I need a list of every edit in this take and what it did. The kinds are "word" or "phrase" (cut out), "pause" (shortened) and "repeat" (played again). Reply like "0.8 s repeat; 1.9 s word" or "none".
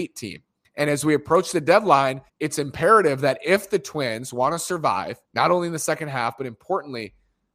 2.3 s pause; 5.2 s pause